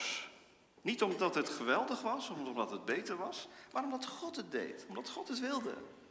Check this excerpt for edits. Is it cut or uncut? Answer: uncut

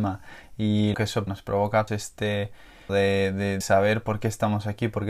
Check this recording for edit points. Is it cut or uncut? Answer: cut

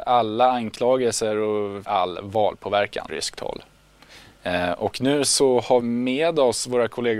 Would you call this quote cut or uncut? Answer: cut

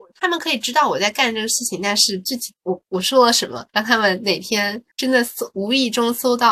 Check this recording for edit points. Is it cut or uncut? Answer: cut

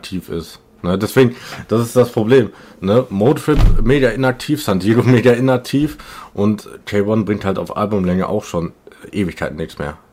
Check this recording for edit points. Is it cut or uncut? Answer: uncut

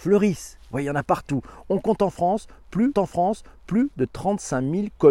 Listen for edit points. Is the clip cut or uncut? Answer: cut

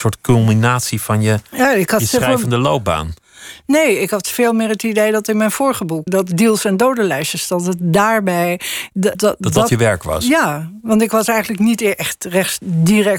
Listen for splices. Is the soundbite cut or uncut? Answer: cut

